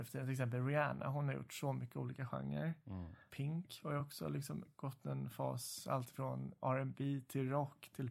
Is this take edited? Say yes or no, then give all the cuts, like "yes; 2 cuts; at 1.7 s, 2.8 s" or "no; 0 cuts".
no; 0 cuts